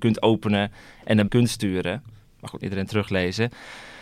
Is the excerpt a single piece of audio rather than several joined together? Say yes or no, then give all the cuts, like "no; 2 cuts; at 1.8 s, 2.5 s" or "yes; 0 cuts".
no; 2 cuts; at 1.3 s, 2.6 s